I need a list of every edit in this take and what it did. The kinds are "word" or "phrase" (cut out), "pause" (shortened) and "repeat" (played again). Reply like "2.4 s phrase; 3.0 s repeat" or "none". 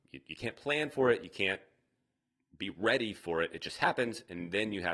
none